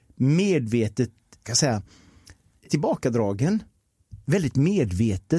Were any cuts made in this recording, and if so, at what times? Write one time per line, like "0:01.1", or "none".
0:01.4
0:02.7

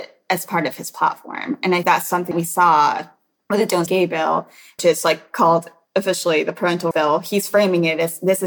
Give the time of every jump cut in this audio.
0:01.8
0:02.3
0:03.9
0:04.8
0:06.9

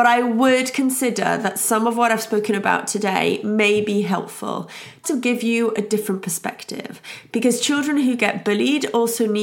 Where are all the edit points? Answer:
0:05.0

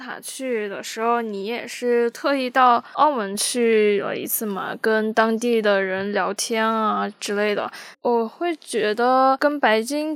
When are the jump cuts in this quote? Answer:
0:07.9

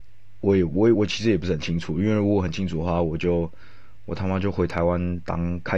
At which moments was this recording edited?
0:00.9

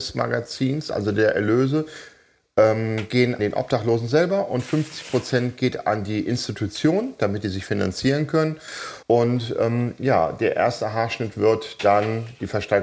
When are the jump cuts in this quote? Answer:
0:03.4
0:09.0

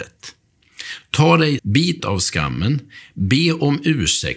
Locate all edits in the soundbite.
0:01.6
0:02.0

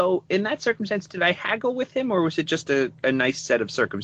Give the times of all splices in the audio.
none

